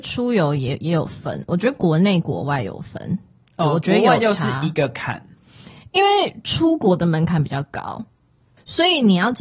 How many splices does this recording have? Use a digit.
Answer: 0